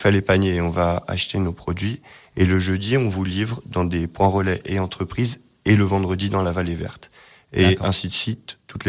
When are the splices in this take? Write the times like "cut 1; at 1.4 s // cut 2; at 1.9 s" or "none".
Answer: none